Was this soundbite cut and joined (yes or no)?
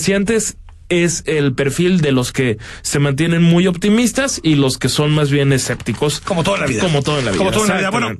no